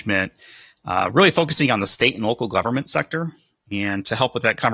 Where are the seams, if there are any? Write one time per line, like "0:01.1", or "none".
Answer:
none